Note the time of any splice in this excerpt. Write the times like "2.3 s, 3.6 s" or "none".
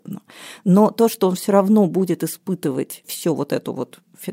3.0 s